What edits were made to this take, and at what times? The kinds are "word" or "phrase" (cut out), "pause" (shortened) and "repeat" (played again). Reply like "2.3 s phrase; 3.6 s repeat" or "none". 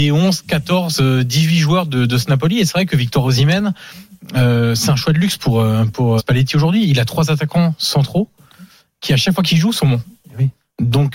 6.2 s word